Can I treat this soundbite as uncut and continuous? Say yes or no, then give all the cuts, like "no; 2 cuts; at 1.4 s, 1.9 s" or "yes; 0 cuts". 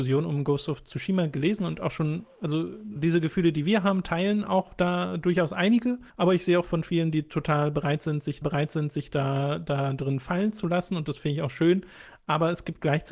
no; 3 cuts; at 3.0 s, 6.1 s, 8.4 s